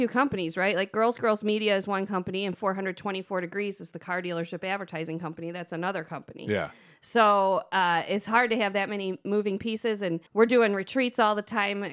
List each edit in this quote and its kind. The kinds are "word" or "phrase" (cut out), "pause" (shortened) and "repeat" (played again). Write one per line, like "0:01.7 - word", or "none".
0:10.3 - pause

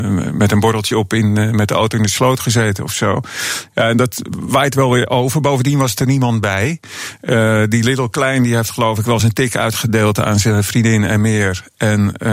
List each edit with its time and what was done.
none

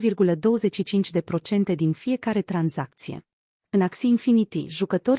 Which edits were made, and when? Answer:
0:03.4 - pause

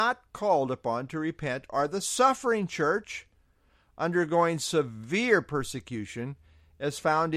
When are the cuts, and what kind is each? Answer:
none

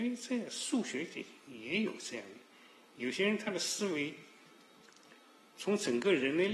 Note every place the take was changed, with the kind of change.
none

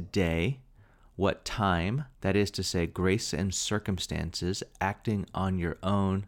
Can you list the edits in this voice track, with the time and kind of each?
0:02.1 - pause

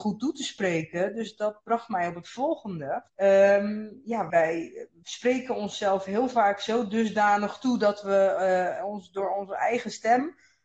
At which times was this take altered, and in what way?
0:03.1 - pause
0:04.3 - word

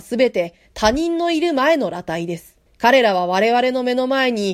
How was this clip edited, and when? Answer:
0:02.7 - pause

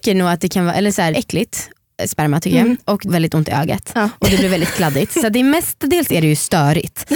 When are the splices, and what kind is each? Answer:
0:01.1 - phrase
0:03.1 - word

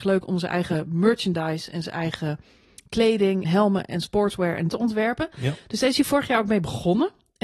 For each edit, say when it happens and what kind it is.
0:03.4 - word
0:04.7 - word

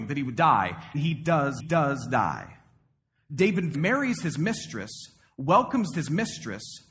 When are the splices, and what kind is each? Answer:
0:00.9 - word
0:01.6 - repeat
0:03.7 - word
0:05.9 - repeat

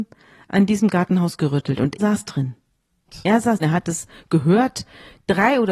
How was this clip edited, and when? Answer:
0:02.0 - word
0:03.6 - word

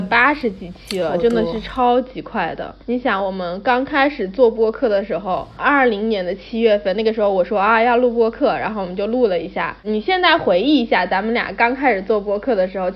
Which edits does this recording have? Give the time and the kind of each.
0:02.8 - pause
0:05.6 - word

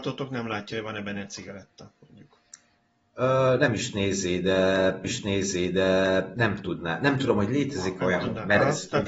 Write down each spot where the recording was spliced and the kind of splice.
0:05.0 - repeat

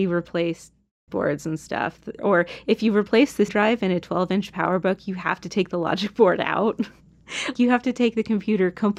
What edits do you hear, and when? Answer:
0:01.1 - word
0:02.2 - word
0:03.5 - word
0:07.5 - word

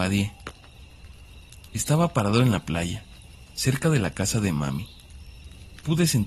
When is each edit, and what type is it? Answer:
none

